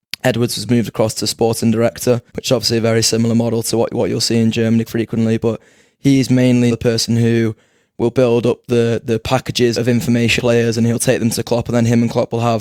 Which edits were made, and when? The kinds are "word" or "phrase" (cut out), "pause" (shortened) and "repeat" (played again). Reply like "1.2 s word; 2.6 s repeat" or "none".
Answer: 2.3 s pause; 4.9 s word; 6.7 s word; 9.7 s word; 10.4 s word